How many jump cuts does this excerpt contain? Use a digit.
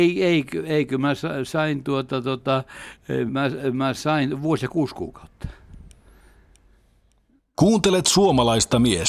1